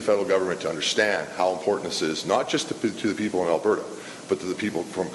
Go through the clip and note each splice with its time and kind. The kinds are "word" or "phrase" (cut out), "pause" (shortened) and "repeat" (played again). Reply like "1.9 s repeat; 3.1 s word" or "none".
none